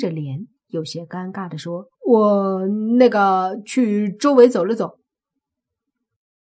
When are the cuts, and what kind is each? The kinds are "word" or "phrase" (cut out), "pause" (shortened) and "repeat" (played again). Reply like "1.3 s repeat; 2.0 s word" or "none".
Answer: 1.9 s pause

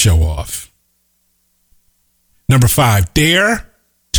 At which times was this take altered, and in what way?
none

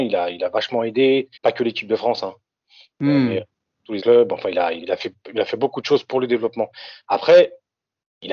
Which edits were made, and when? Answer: 1.4 s pause; 4.0 s word; 4.8 s word

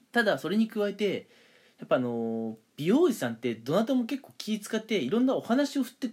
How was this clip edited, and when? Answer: none

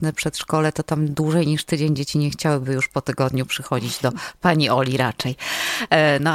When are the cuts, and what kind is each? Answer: none

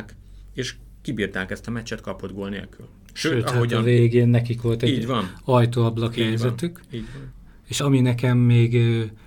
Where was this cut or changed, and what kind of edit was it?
7.8 s word

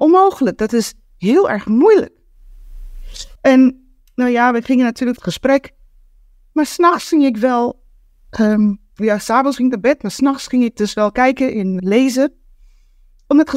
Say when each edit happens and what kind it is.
3.3 s pause; 5.2 s phrase; 11.8 s word

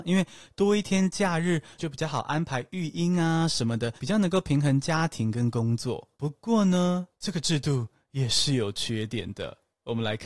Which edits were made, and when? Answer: 4.0 s pause; 6.1 s pause; 7.1 s pause

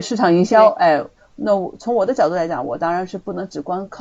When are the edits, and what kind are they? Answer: none

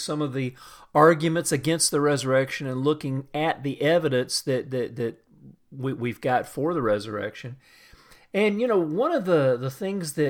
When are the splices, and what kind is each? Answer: none

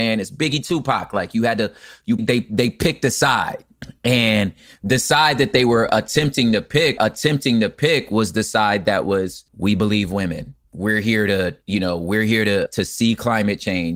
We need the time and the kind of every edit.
2.2 s word; 7.0 s repeat; 9.5 s pause; 10.6 s pause; 12.7 s word

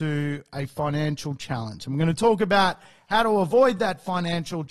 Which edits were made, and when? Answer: none

